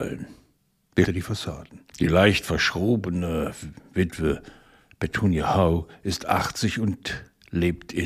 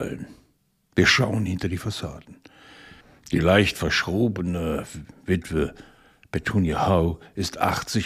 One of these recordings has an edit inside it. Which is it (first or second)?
first